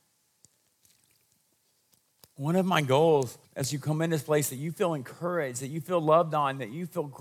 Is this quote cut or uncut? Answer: cut